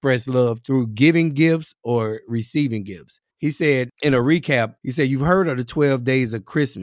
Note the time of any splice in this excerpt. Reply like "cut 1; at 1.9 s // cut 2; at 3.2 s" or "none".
cut 1; at 3.3 s // cut 2; at 3.9 s // cut 3; at 4.8 s